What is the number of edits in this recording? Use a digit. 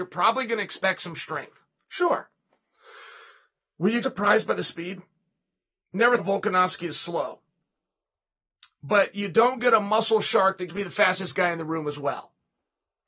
3